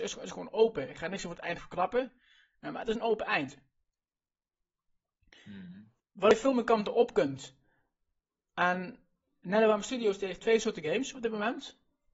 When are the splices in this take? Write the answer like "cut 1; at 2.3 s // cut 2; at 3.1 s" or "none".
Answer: none